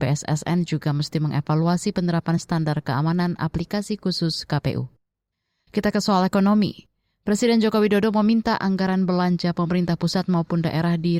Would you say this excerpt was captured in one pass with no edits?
yes; 0 cuts

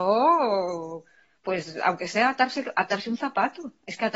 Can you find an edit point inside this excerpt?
no; 0 cuts

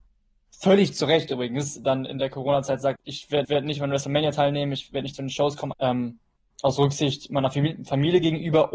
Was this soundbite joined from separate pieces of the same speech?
yes; 3 cuts; at 3.0 s, 3.4 s, 5.7 s

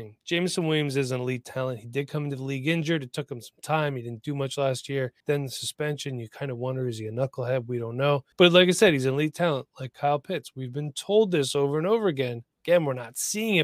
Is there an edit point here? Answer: yes; 3 cuts; at 5.2 s, 8.3 s, 12.5 s

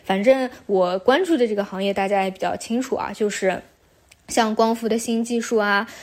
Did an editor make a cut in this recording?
no; 0 cuts

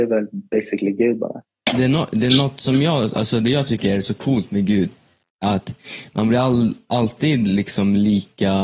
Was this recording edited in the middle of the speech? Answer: no; 0 cuts

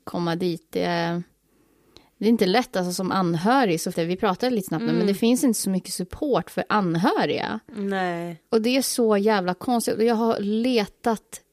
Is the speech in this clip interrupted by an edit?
yes; 1 cut; at 3.9 s

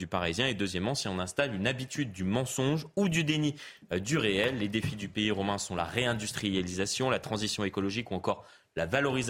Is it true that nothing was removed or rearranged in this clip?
yes; 0 cuts

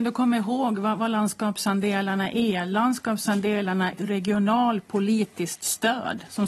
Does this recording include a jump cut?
yes; 1 cut; at 3.9 s

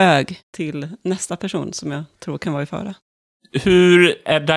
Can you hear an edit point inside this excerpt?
no; 0 cuts

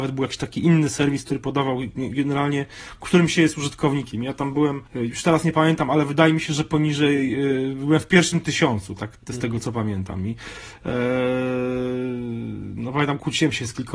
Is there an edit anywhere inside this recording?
yes; 1 cut; at 4.9 s

